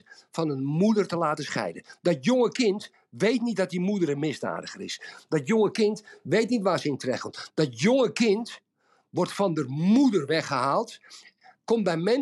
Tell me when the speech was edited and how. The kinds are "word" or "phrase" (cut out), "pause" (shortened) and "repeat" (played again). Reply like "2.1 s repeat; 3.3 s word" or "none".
none